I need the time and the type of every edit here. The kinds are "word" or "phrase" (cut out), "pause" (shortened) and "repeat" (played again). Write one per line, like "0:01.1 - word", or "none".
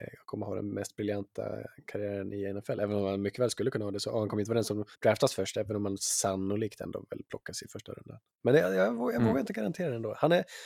0:04.9 - pause